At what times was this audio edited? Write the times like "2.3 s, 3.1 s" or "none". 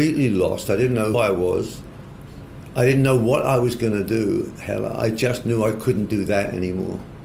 1.1 s